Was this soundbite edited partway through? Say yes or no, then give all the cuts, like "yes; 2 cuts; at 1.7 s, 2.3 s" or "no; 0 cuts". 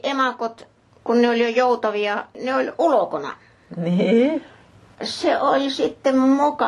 no; 0 cuts